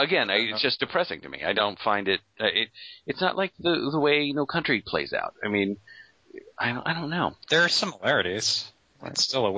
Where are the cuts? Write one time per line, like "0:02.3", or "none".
0:07.4